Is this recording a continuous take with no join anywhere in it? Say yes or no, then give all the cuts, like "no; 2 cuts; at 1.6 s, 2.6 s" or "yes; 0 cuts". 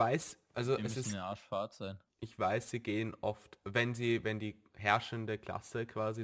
yes; 0 cuts